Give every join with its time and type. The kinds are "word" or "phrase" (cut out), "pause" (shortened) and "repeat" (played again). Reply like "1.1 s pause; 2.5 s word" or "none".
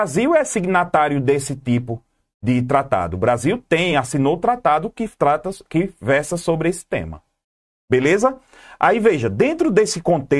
none